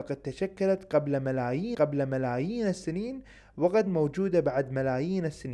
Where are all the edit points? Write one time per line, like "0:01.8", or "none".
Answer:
0:01.7
0:03.9